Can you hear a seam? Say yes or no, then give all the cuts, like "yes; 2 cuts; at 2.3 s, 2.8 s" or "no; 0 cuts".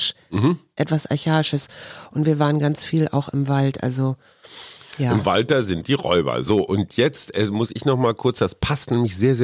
no; 0 cuts